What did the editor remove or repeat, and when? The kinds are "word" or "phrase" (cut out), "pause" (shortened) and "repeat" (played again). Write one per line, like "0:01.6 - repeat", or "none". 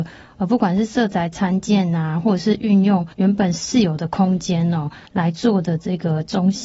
0:03.1 - pause
0:05.1 - pause